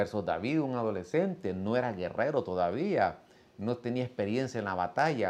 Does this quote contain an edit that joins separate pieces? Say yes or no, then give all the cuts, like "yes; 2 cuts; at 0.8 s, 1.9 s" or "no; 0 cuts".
no; 0 cuts